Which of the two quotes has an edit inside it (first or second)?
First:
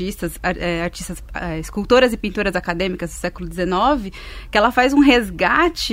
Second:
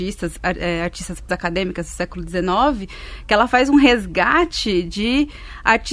second